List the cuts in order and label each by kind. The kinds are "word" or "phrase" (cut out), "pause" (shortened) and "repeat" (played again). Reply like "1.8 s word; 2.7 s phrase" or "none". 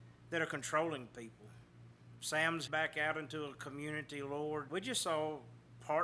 2.7 s word; 4.7 s word